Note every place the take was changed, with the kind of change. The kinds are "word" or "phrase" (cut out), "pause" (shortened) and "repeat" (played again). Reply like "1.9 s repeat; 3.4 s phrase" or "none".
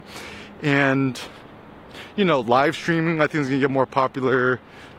none